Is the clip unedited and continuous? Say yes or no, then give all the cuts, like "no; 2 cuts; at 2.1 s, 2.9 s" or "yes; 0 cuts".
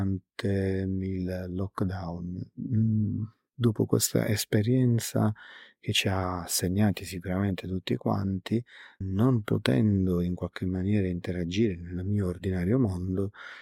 yes; 0 cuts